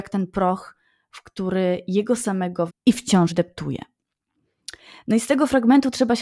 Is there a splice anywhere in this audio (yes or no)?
yes